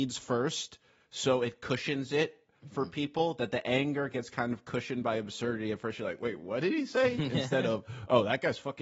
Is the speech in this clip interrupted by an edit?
no; 0 cuts

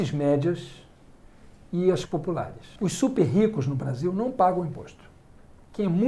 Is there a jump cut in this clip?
yes; 2 cuts; at 2.1 s, 2.8 s

